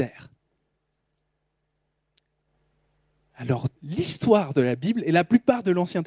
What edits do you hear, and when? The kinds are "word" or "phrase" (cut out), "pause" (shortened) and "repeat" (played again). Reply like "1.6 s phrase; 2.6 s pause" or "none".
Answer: 3.8 s pause